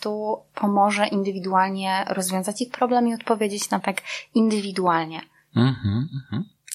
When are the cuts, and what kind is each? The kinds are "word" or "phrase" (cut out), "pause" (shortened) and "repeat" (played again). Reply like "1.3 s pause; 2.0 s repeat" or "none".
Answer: 3.8 s word